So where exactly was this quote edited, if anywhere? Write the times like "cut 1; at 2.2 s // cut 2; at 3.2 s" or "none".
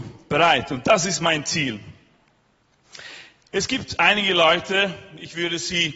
none